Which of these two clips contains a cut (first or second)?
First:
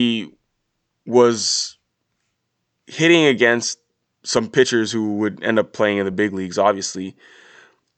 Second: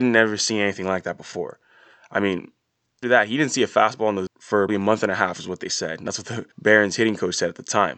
second